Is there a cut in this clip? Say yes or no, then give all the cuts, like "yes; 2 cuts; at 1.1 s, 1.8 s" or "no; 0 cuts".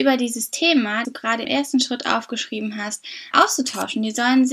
yes; 3 cuts; at 1.0 s, 1.4 s, 3.3 s